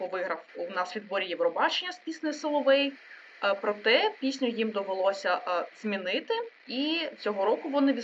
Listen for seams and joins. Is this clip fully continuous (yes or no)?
no